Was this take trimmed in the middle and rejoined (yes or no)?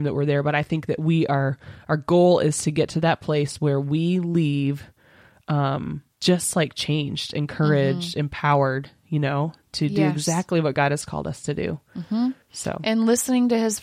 yes